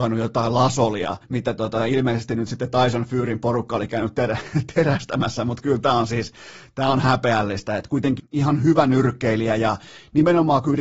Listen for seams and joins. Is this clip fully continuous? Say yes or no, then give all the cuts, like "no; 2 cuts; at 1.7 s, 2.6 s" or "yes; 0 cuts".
no; 2 cuts; at 1.2 s, 8.2 s